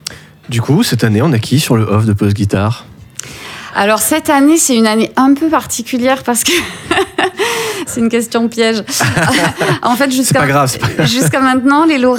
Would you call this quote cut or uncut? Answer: uncut